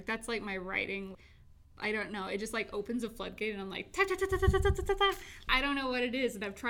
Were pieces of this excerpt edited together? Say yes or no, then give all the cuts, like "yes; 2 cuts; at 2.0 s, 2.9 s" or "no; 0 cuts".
no; 0 cuts